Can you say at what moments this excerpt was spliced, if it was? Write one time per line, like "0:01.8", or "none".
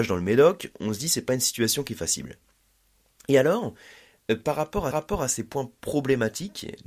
0:04.9